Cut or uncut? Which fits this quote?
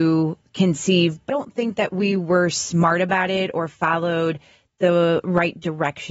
cut